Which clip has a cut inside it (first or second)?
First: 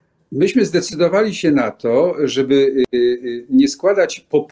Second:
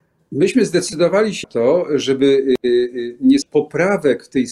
second